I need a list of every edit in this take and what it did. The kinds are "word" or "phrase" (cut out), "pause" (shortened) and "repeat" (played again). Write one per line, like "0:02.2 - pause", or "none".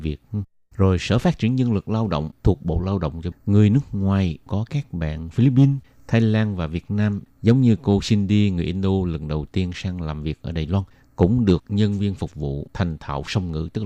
0:03.3 - word
0:04.5 - word